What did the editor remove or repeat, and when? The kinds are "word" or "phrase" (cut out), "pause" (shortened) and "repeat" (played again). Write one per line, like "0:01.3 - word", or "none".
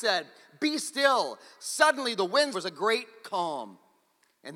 0:02.5 - phrase